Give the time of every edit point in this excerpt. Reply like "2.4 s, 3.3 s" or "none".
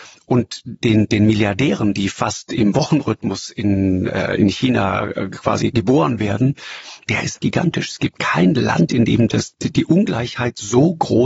7.0 s, 7.4 s